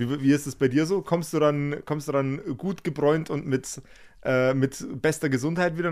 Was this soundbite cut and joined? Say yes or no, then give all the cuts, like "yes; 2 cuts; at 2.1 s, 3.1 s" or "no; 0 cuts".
no; 0 cuts